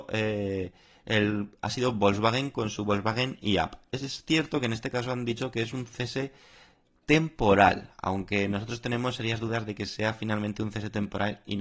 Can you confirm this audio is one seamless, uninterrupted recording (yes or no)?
yes